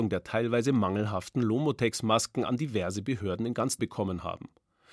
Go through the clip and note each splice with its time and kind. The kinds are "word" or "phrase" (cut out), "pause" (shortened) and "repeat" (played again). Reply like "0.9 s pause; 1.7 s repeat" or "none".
3.8 s word